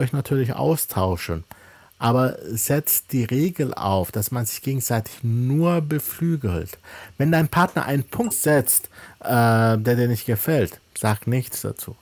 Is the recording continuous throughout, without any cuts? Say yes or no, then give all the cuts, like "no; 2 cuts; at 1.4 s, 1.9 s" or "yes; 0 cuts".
no; 1 cut; at 8.3 s